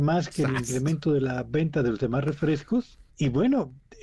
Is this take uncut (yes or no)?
no